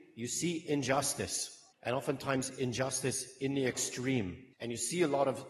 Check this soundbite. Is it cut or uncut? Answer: cut